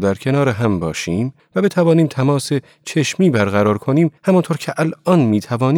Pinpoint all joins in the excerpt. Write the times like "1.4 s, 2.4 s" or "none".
1.4 s, 4.2 s

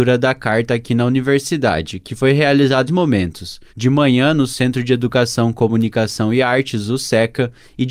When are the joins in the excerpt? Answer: 2.9 s, 3.7 s

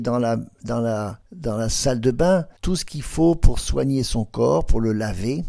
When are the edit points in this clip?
1.2 s, 2.6 s

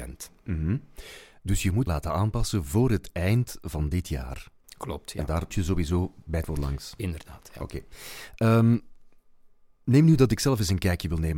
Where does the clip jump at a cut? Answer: 1.9 s, 5.5 s, 6.4 s

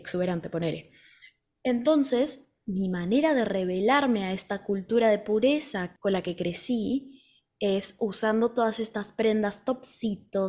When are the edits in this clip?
none

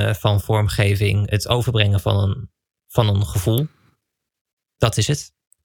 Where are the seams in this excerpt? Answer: none

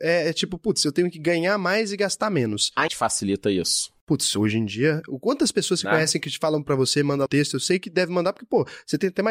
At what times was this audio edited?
2.9 s, 7.3 s

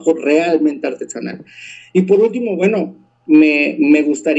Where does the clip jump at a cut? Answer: none

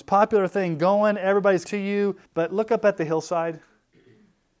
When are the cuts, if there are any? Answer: 1.7 s, 2.3 s

